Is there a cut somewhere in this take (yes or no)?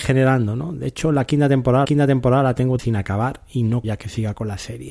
yes